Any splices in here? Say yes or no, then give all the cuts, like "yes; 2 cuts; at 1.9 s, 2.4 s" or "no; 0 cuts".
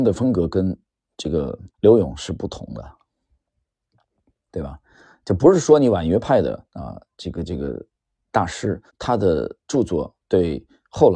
yes; 3 cuts; at 1.7 s, 6.7 s, 8.9 s